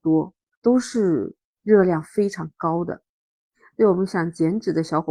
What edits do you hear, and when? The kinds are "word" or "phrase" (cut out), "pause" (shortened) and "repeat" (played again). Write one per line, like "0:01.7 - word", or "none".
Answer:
none